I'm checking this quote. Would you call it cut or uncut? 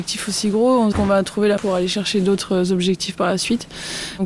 cut